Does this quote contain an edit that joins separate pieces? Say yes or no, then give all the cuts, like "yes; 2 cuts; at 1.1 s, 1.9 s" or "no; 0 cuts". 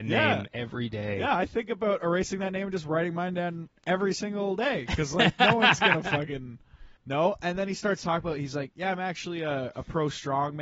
yes; 1 cut; at 7.0 s